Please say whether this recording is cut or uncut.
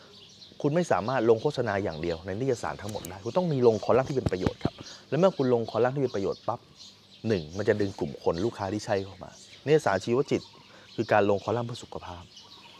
uncut